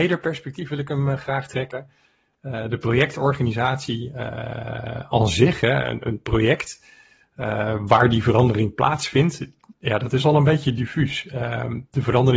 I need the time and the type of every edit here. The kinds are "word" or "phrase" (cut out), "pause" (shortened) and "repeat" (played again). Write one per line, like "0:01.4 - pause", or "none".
none